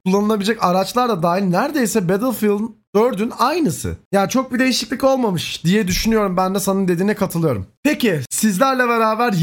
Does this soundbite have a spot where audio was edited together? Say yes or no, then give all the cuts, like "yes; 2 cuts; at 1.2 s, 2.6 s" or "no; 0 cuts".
no; 0 cuts